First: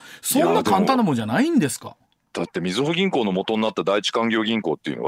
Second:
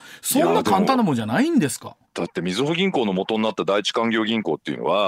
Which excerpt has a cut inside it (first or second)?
second